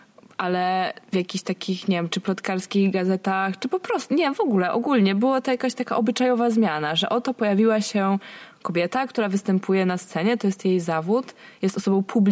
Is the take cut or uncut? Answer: cut